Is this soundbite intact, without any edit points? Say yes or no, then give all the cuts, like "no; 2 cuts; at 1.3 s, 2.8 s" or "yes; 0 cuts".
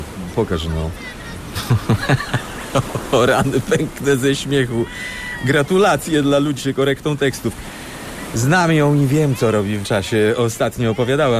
no; 2 cuts; at 6.6 s, 9.8 s